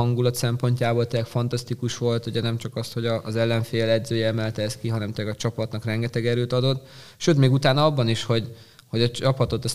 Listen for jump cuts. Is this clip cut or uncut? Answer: uncut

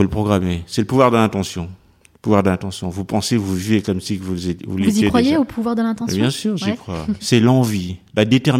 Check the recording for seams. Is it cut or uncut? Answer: cut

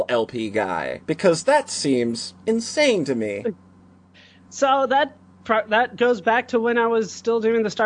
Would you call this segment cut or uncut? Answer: uncut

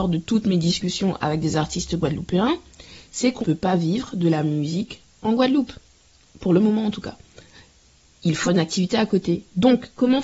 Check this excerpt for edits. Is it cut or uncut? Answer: cut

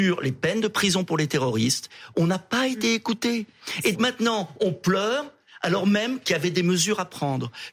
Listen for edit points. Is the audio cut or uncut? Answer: cut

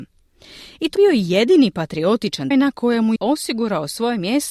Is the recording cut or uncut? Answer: cut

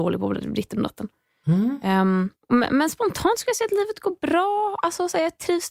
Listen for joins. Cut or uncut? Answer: cut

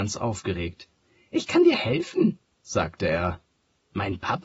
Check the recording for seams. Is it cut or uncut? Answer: uncut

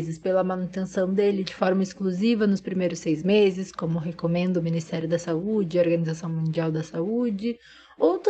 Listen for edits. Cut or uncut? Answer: uncut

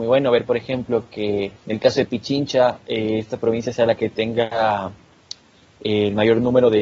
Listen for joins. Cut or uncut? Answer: cut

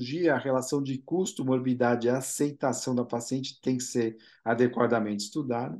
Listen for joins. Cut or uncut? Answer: uncut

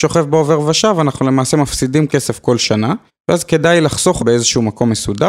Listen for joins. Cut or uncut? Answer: cut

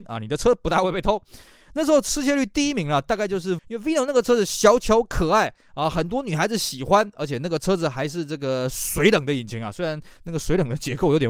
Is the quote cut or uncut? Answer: cut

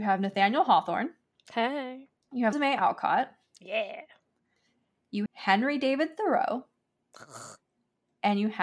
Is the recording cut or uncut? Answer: cut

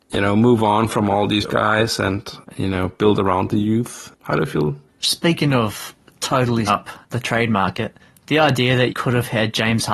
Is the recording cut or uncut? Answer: cut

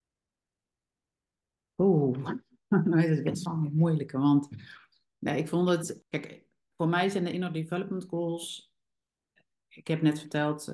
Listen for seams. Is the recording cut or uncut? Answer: cut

